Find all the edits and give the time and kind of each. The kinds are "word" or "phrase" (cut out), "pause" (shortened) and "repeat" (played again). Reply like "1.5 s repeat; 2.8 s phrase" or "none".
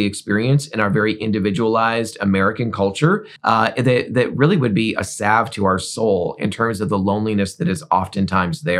3.4 s pause